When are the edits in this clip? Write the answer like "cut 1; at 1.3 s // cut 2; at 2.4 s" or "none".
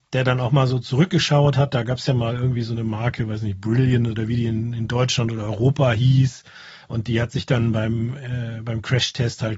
none

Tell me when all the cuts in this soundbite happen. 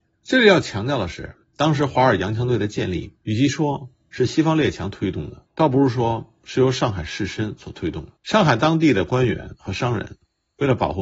cut 1; at 1.4 s // cut 2; at 3.2 s // cut 3; at 5.5 s // cut 4; at 8.2 s

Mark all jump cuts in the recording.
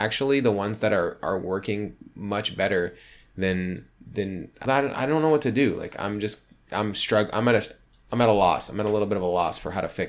cut 1; at 4.6 s

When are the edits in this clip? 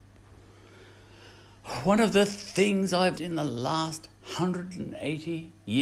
cut 1; at 3.2 s

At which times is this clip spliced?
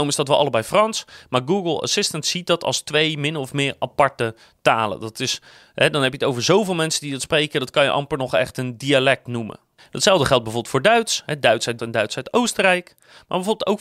cut 1; at 11.8 s

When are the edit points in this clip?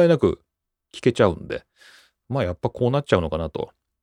none

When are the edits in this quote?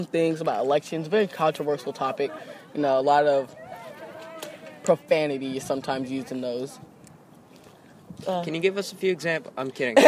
none

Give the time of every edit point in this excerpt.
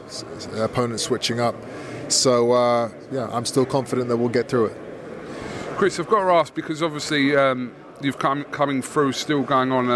none

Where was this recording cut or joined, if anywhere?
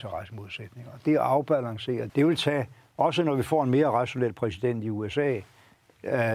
cut 1; at 2.1 s

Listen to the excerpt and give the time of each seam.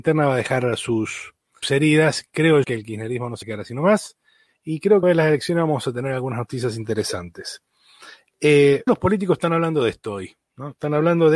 cut 1; at 1.6 s // cut 2; at 2.6 s // cut 3; at 3.4 s // cut 4; at 5.0 s // cut 5; at 8.9 s

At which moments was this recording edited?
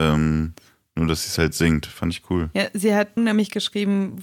cut 1; at 3.2 s

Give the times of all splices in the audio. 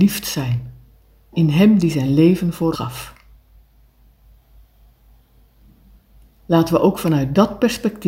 cut 1; at 2.7 s

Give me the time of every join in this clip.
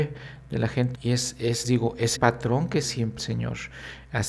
cut 1; at 0.9 s // cut 2; at 1.6 s // cut 3; at 2.1 s // cut 4; at 2.8 s // cut 5; at 3.2 s

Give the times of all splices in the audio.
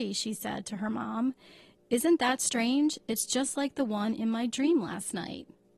none

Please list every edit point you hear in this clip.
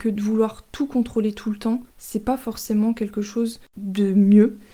cut 1; at 1.9 s

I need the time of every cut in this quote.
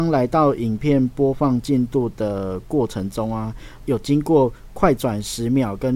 cut 1; at 3.8 s

